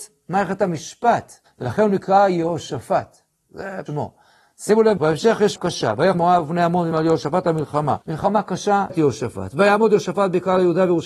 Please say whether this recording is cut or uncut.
cut